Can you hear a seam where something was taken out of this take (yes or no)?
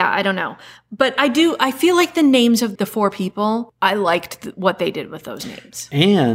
yes